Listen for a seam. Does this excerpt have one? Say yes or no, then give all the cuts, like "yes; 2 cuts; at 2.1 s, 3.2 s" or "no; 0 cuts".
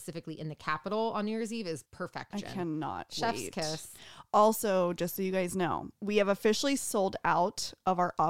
yes; 2 cuts; at 1.8 s, 5.9 s